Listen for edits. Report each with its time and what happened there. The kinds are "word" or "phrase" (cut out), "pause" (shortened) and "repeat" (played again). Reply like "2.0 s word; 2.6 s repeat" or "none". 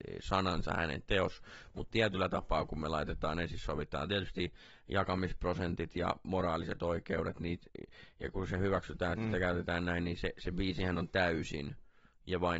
none